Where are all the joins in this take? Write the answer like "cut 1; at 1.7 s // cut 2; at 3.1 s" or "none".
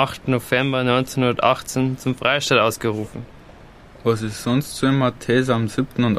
none